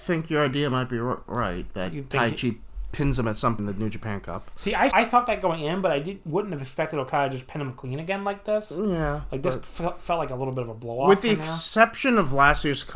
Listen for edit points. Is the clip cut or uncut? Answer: cut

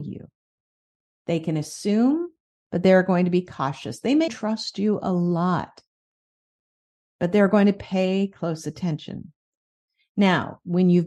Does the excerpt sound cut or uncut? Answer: cut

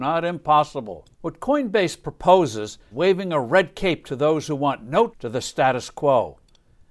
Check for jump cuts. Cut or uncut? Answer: cut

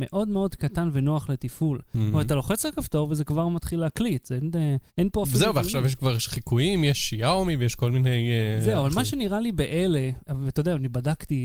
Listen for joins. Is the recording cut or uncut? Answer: cut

